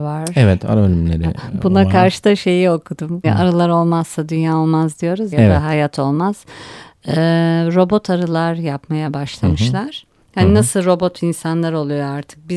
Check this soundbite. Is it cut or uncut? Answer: cut